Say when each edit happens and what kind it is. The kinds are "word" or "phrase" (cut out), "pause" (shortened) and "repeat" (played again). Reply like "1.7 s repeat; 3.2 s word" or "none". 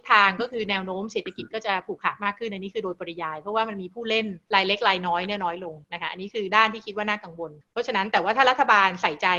4.4 s pause; 5.8 s pause; 7.6 s pause